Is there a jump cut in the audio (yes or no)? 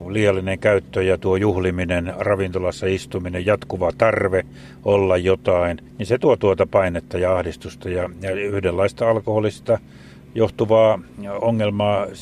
yes